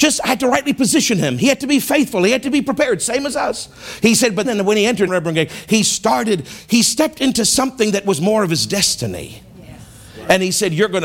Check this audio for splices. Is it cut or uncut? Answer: cut